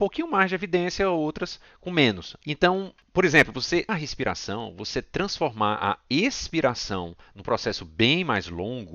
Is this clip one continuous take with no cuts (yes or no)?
no